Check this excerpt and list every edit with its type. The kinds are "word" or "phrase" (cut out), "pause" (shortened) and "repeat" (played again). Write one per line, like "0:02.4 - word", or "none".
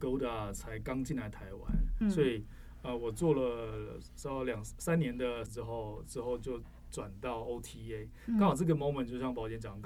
0:02.0 - word
0:05.5 - word